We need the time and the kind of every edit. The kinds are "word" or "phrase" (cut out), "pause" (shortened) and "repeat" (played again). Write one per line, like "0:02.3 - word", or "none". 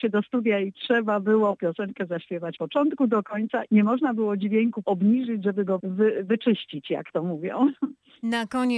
0:01.6 - phrase
0:02.6 - word
0:03.7 - word
0:04.8 - phrase
0:05.8 - word